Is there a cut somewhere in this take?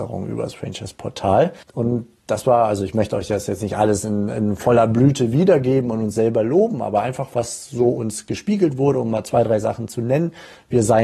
yes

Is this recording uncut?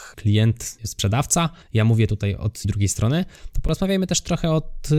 no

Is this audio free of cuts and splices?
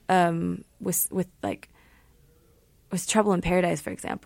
yes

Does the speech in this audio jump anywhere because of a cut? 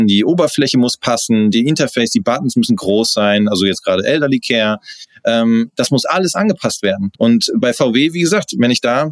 yes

